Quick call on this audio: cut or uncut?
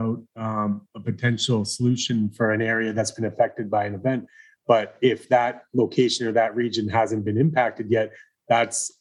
uncut